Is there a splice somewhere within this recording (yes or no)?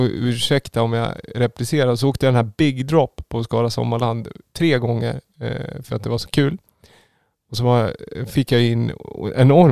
no